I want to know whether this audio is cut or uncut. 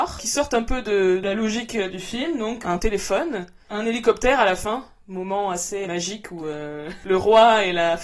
cut